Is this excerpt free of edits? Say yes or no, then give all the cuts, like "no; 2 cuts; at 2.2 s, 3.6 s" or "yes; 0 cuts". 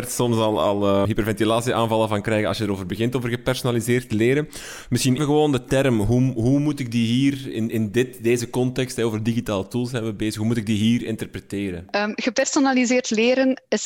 no; 2 cuts; at 1.0 s, 5.2 s